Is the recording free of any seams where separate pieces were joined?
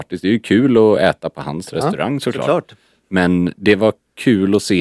yes; 0 cuts

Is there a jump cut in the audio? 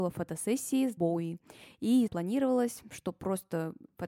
yes; 2 cuts; at 1.0 s, 2.1 s

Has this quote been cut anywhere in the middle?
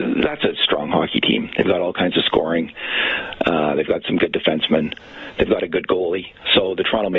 no; 0 cuts

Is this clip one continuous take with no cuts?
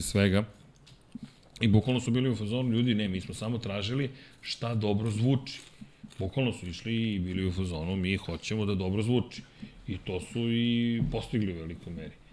yes; 0 cuts

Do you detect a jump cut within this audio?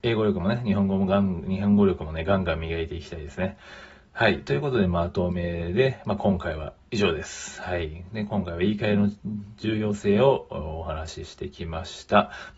no; 0 cuts

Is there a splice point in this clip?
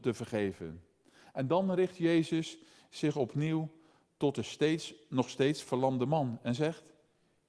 no; 0 cuts

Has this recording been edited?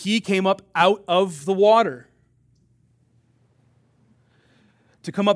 no; 0 cuts

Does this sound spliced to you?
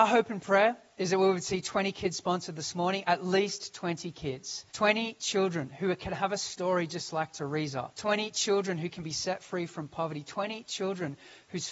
yes; 2 cuts; at 4.7 s, 7.9 s

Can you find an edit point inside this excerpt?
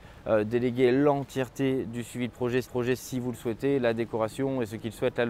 yes; 1 cut; at 2.6 s

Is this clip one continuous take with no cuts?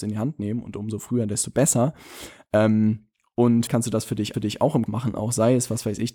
no; 3 cuts; at 3.7 s, 4.3 s, 4.9 s

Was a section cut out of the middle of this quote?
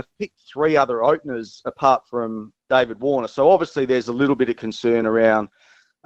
no; 0 cuts

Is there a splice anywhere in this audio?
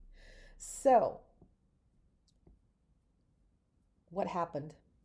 no; 0 cuts

